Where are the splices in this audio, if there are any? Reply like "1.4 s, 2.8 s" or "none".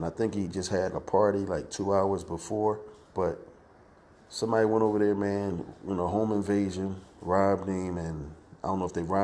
0.9 s, 3.0 s, 7.1 s